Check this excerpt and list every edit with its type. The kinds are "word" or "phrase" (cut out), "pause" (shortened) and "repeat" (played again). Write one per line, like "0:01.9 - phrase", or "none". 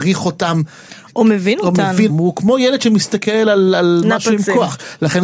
0:02.1 - word